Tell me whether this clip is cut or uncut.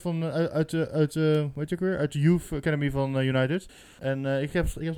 uncut